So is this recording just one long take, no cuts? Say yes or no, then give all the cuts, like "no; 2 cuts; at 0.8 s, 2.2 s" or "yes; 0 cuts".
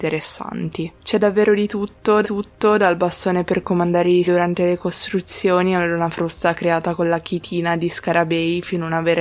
no; 2 cuts; at 2.2 s, 4.2 s